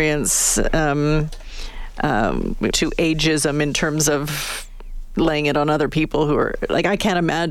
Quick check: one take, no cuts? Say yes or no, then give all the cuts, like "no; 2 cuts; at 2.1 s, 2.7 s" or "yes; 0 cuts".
no; 1 cut; at 2.7 s